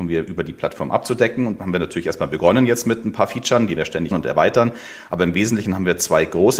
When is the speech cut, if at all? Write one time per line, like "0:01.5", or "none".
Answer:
0:01.6
0:03.8
0:04.1